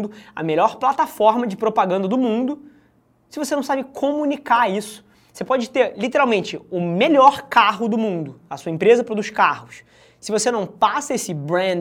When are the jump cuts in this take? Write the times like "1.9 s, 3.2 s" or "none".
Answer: none